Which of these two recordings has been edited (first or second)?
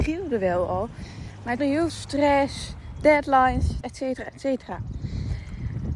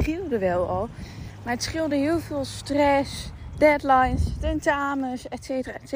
first